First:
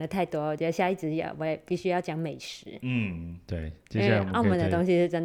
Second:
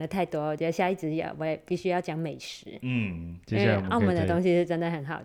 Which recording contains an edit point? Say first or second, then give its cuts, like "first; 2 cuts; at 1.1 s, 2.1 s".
second; 1 cut; at 3.4 s